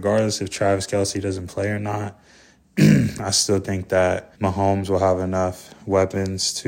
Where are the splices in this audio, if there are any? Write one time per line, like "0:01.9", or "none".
0:04.3